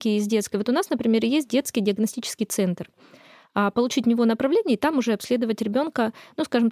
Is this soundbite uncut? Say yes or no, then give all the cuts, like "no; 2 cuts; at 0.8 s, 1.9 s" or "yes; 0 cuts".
yes; 0 cuts